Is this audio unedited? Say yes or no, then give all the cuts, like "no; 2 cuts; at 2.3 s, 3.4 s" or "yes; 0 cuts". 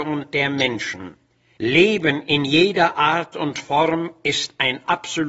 yes; 0 cuts